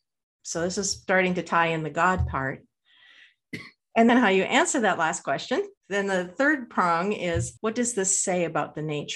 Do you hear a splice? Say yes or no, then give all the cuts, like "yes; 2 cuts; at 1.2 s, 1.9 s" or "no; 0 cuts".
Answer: yes; 3 cuts; at 4.1 s, 5.8 s, 7.6 s